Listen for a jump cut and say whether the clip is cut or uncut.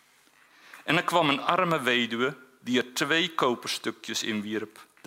uncut